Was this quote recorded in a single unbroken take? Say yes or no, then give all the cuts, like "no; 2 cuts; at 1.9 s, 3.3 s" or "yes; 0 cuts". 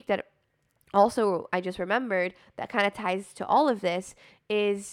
yes; 0 cuts